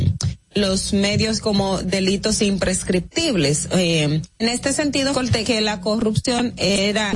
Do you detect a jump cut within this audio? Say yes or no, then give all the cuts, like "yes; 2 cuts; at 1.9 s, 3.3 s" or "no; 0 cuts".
yes; 4 cuts; at 1.4 s, 4.4 s, 5.1 s, 5.4 s